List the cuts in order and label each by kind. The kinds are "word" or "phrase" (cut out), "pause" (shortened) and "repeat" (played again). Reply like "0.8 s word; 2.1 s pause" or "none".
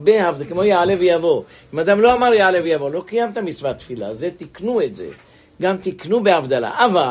none